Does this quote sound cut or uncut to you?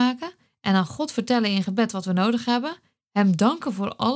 uncut